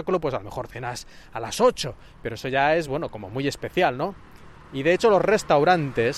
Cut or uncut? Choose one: uncut